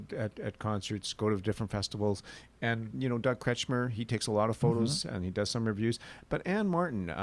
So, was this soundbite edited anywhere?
yes; 1 cut; at 2.9 s

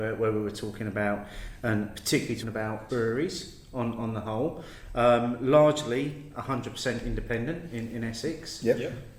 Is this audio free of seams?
no; 4 cuts; at 2.4 s, 2.9 s, 4.0 s, 7.7 s

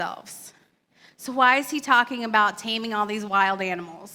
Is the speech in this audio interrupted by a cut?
no; 0 cuts

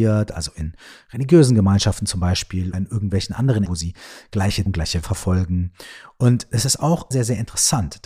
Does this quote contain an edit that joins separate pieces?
yes; 5 cuts; at 2.7 s, 3.6 s, 4.7 s, 5.0 s, 7.1 s

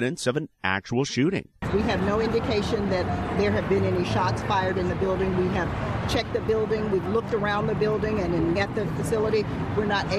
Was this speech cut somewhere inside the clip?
yes; 1 cut; at 8.6 s

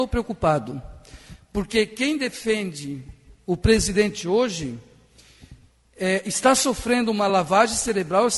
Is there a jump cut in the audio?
no; 0 cuts

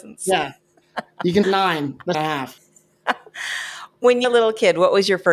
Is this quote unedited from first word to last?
no; 3 cuts; at 1.4 s, 2.1 s, 4.2 s

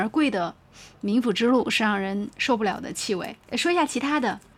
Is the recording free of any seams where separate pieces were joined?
no; 1 cut; at 3.5 s

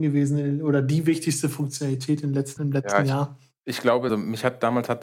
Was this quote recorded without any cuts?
no; 2 cuts; at 2.6 s, 4.1 s

